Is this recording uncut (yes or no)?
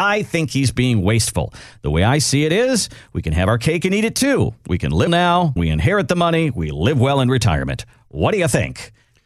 no